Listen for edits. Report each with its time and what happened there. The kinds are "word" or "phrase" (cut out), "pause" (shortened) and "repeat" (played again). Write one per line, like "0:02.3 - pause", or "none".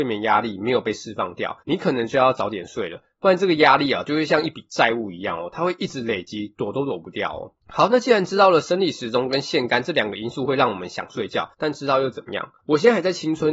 0:01.6 - pause
0:07.6 - pause
0:11.5 - pause
0:12.6 - pause